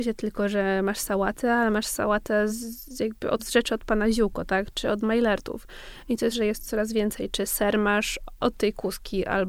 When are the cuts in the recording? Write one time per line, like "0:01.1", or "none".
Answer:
0:02.5
0:03.4
0:06.3
0:08.4

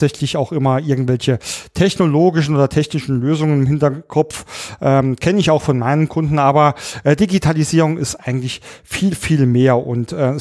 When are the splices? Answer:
none

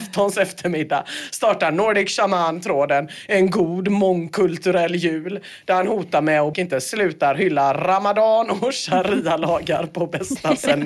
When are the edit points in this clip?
0:06.5

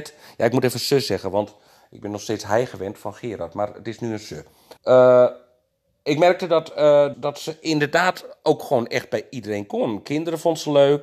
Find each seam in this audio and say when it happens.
0:04.8
0:07.1

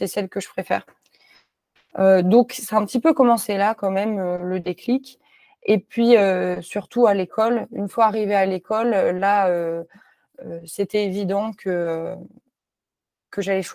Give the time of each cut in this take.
none

